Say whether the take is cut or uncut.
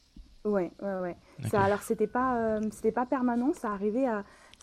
uncut